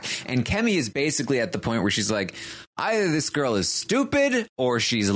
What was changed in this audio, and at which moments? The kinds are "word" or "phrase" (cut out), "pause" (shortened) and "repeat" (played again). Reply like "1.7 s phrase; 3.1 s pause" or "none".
none